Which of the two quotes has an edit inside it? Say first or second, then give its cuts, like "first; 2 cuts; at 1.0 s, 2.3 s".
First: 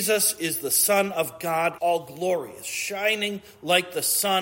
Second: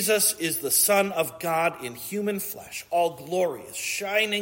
first; 1 cut; at 1.8 s